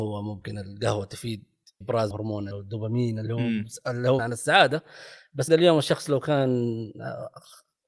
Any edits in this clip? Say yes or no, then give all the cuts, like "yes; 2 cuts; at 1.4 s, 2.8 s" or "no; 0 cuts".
yes; 5 cuts; at 1.8 s, 2.1 s, 2.5 s, 4.2 s, 5.5 s